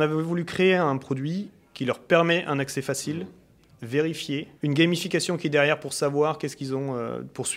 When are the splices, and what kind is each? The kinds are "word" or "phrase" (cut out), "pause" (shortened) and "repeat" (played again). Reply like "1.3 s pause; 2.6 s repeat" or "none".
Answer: 4.6 s pause